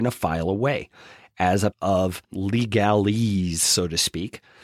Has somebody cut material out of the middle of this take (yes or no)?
yes